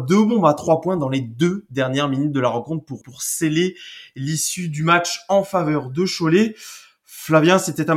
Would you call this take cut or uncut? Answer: cut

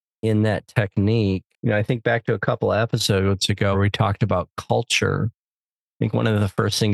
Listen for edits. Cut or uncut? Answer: cut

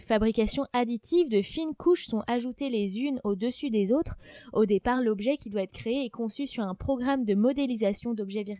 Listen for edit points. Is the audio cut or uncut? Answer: uncut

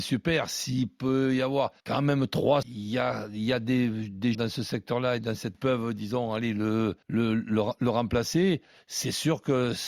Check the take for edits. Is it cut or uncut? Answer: cut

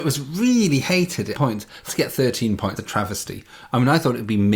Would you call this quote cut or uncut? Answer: cut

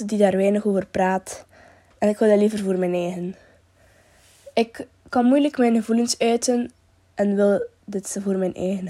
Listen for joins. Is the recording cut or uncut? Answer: uncut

